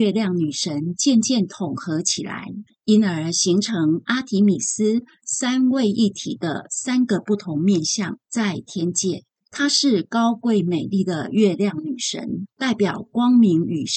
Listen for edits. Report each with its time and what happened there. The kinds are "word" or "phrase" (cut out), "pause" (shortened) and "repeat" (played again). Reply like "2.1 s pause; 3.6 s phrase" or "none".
2.7 s pause; 8.2 s pause; 9.4 s pause; 12.5 s pause